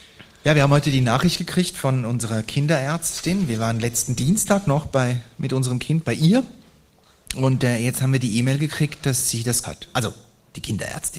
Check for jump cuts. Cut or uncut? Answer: cut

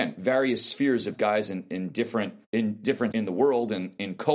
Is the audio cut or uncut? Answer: cut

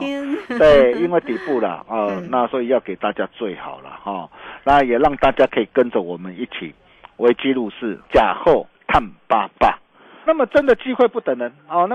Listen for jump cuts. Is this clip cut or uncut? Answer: cut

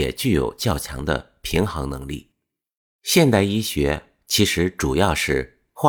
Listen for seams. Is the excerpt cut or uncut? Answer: uncut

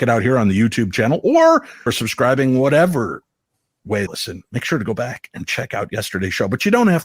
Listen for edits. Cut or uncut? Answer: cut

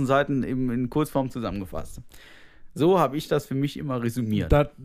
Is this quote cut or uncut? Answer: uncut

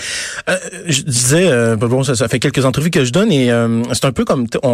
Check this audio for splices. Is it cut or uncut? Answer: uncut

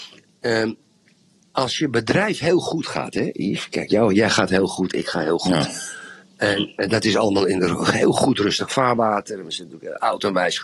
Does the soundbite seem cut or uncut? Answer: uncut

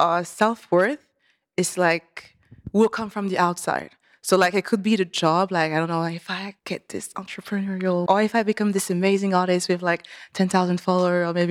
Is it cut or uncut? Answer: cut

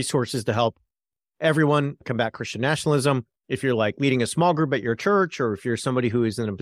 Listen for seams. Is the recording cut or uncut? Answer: cut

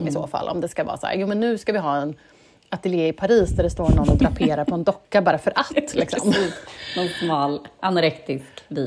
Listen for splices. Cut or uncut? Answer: uncut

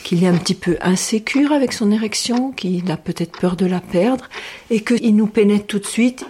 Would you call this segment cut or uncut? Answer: cut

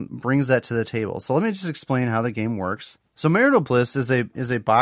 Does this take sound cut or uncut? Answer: uncut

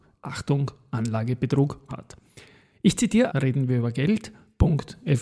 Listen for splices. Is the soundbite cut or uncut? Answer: cut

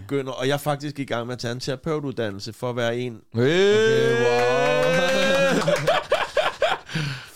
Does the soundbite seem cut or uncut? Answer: uncut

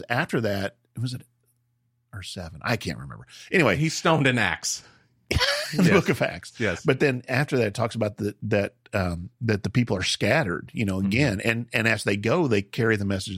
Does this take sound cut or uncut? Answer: uncut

